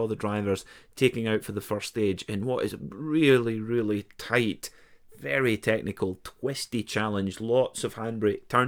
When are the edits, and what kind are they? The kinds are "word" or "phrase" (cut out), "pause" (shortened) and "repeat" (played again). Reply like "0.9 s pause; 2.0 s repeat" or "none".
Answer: none